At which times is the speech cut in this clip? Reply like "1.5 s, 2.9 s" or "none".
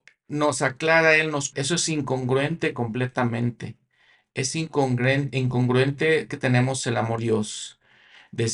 1.5 s, 6.3 s, 7.2 s